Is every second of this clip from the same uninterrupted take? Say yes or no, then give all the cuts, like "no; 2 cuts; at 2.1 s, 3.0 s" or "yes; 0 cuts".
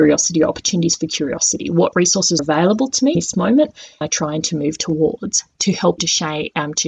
no; 4 cuts; at 2.4 s, 3.1 s, 4.0 s, 6.0 s